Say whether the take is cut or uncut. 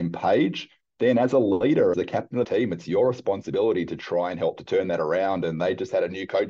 cut